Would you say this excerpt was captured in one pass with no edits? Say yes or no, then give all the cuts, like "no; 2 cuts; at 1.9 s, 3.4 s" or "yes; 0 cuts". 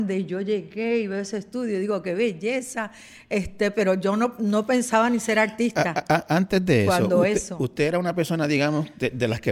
yes; 0 cuts